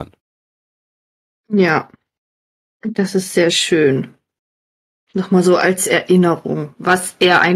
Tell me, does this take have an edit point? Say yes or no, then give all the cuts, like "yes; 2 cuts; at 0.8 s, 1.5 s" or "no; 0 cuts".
no; 0 cuts